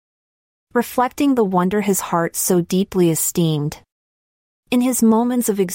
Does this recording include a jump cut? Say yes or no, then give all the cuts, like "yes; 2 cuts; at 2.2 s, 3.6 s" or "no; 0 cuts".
no; 0 cuts